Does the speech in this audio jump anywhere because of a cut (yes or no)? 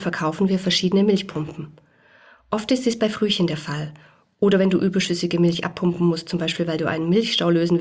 no